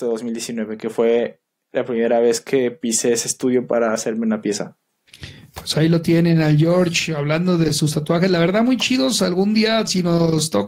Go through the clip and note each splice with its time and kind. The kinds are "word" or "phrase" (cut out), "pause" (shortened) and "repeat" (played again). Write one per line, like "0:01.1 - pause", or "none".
none